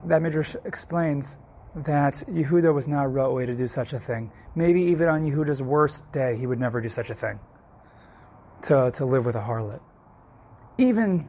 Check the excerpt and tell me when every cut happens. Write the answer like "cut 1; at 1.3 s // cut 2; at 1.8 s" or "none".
none